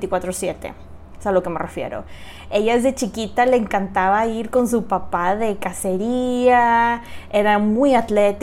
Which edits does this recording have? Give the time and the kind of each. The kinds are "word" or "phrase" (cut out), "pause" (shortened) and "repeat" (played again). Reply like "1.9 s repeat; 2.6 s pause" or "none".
none